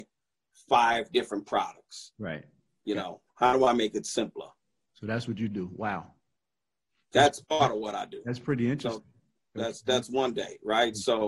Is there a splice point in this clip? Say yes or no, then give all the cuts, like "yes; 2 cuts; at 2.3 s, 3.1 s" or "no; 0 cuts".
no; 0 cuts